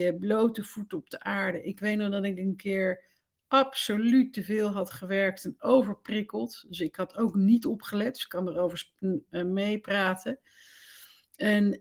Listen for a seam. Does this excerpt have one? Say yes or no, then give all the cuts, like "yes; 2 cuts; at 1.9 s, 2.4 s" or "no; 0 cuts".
no; 0 cuts